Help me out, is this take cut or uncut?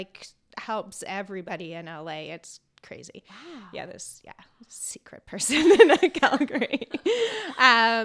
uncut